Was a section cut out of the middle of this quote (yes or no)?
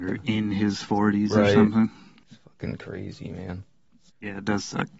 no